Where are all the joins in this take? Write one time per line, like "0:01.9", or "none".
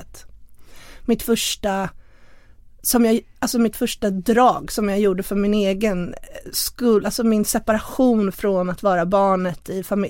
none